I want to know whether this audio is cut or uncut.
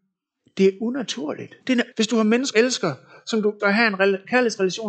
cut